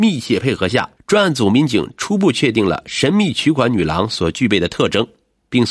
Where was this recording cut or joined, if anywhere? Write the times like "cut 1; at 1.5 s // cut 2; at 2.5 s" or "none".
cut 1; at 1.0 s